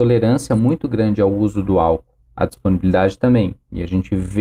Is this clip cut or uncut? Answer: cut